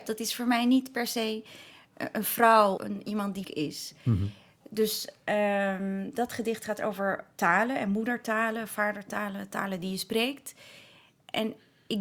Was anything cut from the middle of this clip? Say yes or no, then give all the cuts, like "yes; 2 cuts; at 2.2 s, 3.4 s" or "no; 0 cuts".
yes; 2 cuts; at 2.8 s, 3.4 s